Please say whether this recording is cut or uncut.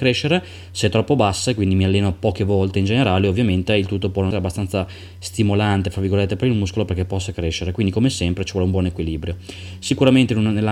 cut